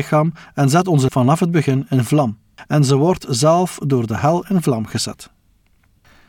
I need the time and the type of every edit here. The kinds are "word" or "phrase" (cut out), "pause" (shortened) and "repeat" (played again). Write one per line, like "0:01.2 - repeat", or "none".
0:01.1 - word